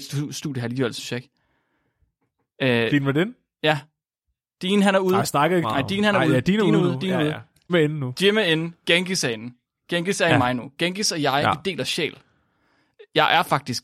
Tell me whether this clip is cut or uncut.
cut